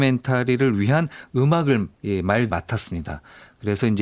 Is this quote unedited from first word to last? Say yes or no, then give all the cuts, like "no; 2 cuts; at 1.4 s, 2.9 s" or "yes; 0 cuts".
no; 2 cuts; at 1.9 s, 2.5 s